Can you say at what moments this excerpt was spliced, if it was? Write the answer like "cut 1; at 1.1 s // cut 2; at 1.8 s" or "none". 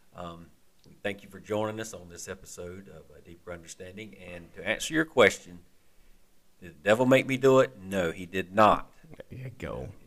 none